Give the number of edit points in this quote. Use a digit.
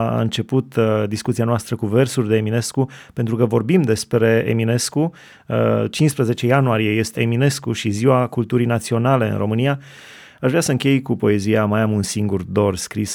1